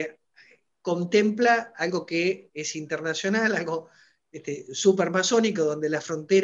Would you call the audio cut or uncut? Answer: uncut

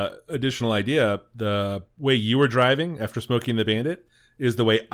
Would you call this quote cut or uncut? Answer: uncut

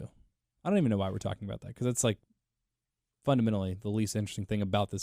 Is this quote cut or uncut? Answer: uncut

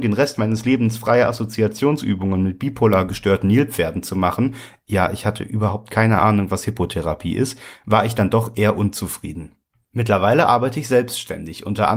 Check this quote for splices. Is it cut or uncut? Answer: uncut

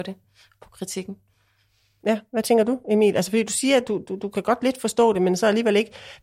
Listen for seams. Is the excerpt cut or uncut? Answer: uncut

